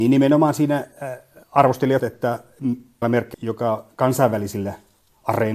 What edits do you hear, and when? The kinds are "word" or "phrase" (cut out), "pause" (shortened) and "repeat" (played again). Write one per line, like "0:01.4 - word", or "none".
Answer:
0:02.0 - word
0:03.0 - word
0:03.3 - word